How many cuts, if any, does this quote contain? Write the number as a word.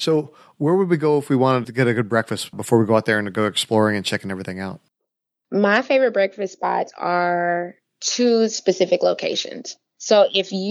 one